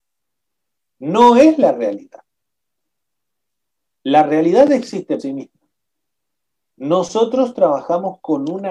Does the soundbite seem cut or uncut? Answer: cut